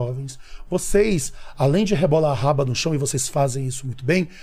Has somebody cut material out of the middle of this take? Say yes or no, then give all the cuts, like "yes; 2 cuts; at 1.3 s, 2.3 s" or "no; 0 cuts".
no; 0 cuts